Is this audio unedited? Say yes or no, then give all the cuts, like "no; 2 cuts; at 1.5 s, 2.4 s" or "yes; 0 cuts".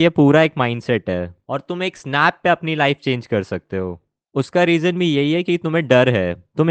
yes; 0 cuts